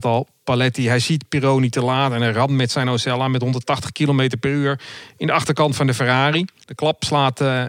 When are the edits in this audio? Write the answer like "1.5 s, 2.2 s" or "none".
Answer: 6.6 s